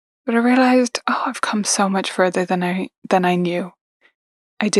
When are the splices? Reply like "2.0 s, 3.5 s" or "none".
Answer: none